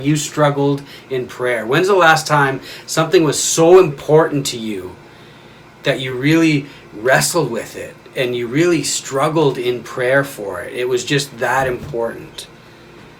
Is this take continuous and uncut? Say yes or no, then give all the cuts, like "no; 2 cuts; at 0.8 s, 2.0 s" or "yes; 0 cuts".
yes; 0 cuts